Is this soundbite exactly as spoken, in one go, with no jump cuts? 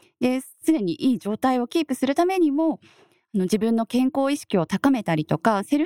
yes; 0 cuts

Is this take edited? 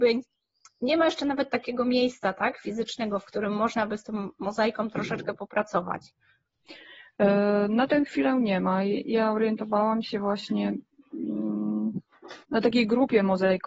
yes; 1 cut; at 12.4 s

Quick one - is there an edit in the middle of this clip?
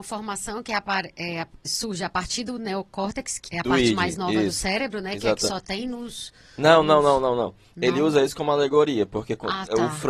yes; 2 cuts; at 1.6 s, 3.5 s

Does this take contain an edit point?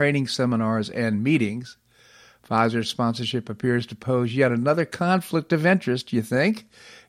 no; 0 cuts

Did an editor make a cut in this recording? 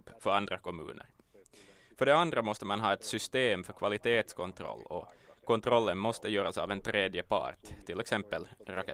no; 0 cuts

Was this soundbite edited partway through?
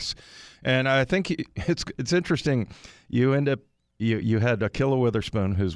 no; 0 cuts

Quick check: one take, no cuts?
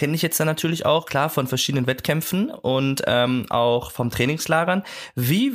yes; 0 cuts

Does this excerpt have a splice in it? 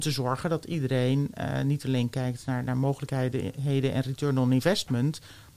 no; 0 cuts

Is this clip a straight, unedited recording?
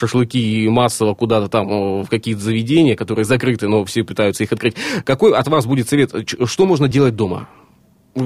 yes; 0 cuts

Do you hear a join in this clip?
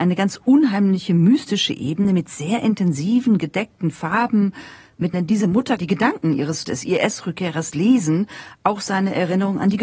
yes; 3 cuts; at 5.1 s, 5.8 s, 6.6 s

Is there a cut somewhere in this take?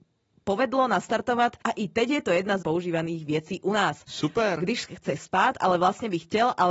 yes; 2 cuts; at 1.6 s, 2.6 s

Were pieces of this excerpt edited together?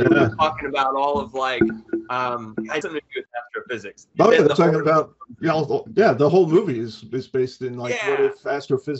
yes; 1 cut; at 2.8 s

